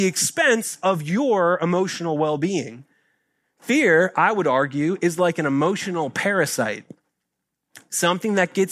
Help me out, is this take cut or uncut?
uncut